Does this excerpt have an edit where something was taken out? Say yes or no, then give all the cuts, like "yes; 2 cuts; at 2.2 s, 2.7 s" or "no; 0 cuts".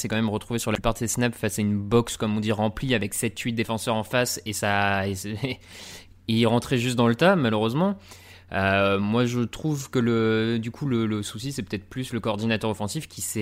no; 0 cuts